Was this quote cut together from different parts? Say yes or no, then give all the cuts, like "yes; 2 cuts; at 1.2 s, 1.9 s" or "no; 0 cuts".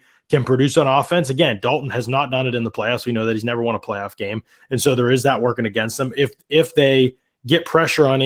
no; 0 cuts